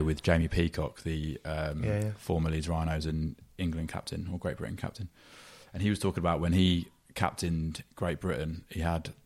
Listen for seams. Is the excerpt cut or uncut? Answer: uncut